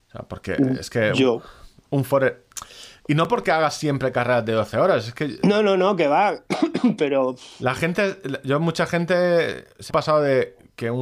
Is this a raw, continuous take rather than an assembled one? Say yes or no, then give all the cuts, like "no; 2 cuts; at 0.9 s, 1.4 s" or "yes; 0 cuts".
no; 1 cut; at 9.9 s